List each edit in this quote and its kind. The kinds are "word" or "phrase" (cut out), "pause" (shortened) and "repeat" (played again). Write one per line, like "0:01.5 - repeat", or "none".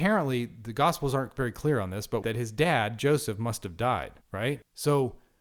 0:02.2 - phrase
0:04.2 - pause